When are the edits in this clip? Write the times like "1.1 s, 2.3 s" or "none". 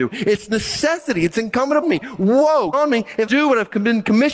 1.8 s, 2.7 s, 3.3 s